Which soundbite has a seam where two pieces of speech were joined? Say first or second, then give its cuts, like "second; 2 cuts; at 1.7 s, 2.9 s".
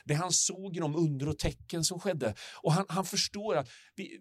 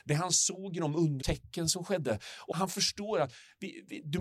second; 2 cuts; at 1.2 s, 2.5 s